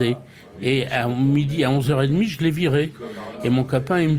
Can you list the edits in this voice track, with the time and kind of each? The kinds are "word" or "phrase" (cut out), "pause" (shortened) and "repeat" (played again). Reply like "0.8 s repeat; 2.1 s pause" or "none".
none